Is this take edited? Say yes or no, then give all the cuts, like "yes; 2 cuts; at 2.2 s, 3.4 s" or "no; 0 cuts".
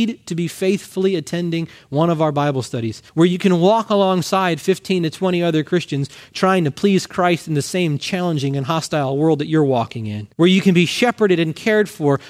yes; 2 cuts; at 3.1 s, 10.3 s